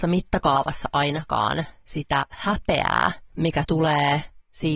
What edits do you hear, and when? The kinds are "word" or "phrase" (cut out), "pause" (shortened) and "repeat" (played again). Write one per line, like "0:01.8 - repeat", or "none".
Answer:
0:03.3 - pause